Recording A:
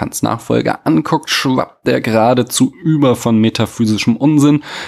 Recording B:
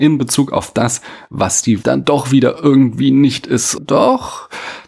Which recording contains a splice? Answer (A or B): B